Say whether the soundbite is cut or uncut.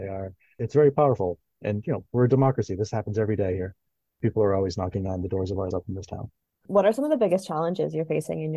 cut